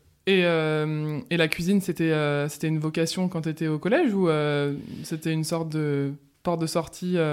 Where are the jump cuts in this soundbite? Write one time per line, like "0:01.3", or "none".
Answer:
none